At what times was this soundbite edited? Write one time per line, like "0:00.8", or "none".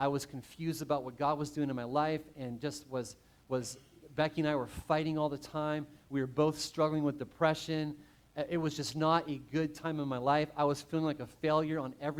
none

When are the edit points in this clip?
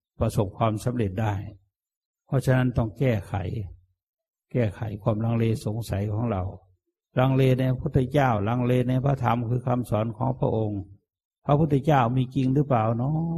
none

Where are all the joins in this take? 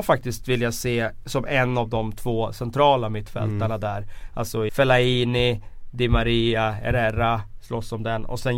0:04.7

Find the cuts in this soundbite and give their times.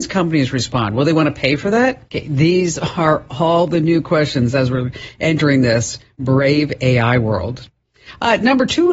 0:02.1

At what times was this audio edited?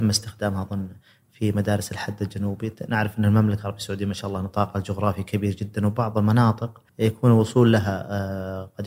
0:06.9

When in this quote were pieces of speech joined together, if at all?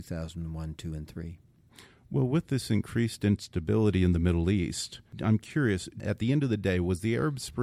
none

